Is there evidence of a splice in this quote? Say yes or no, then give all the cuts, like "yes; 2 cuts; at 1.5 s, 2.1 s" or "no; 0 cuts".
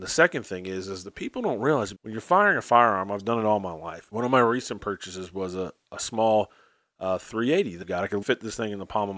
yes; 3 cuts; at 1.9 s, 7.8 s, 8.2 s